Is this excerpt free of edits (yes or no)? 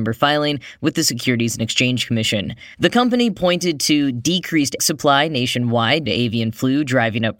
no